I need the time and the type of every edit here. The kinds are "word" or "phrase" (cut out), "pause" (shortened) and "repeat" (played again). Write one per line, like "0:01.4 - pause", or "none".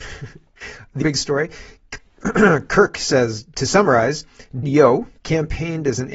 0:01.0 - word
0:04.6 - word
0:05.2 - pause